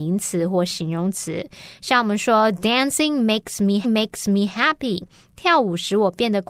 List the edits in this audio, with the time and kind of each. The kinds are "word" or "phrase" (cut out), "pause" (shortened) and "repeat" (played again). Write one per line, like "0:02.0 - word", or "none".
0:03.8 - repeat